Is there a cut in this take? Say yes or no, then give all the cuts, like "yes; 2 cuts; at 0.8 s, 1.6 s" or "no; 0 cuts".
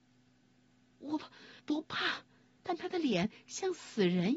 yes; 2 cuts; at 1.6 s, 2.6 s